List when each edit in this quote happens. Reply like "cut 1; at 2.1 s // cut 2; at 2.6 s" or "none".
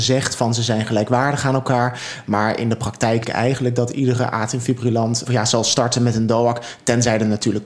cut 1; at 3.2 s // cut 2; at 5.3 s